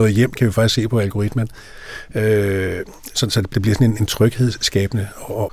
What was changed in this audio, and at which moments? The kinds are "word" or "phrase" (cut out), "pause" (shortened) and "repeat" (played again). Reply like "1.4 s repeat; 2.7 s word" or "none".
3.1 s word; 3.5 s word; 3.9 s word